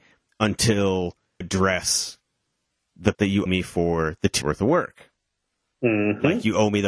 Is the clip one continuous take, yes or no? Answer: no